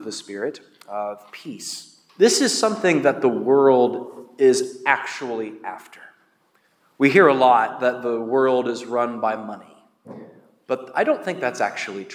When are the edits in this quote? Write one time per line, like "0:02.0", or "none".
0:02.1